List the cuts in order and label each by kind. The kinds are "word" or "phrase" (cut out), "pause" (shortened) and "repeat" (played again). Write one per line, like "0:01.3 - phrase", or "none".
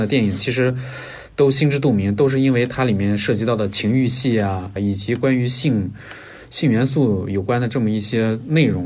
0:04.8 - phrase